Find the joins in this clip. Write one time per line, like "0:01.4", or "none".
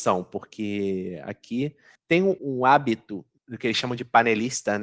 0:02.0
0:02.4